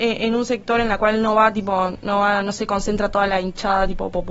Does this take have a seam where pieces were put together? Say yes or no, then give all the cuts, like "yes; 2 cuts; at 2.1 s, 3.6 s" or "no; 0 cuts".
no; 0 cuts